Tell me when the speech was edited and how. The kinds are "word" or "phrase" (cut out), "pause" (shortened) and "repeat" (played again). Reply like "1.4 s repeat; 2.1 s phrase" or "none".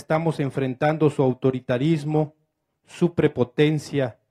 none